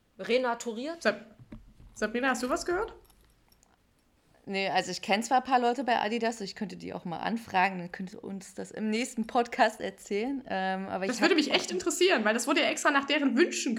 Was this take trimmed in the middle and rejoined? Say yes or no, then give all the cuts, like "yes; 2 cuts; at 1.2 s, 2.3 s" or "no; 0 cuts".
no; 0 cuts